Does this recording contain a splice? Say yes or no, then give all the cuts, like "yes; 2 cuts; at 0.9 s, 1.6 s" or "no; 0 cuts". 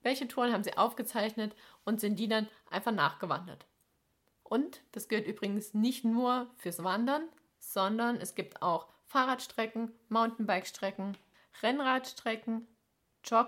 no; 0 cuts